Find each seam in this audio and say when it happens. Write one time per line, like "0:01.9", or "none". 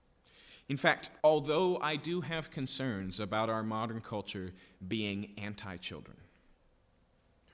0:01.2